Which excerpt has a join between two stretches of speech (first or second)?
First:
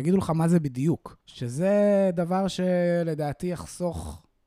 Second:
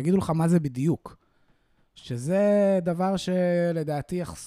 first